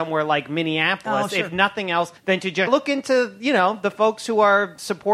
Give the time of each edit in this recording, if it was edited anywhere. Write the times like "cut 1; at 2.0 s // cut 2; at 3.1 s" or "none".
cut 1; at 2.2 s // cut 2; at 2.7 s